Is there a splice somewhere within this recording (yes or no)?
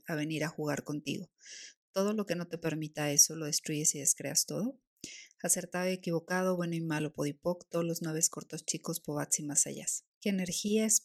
no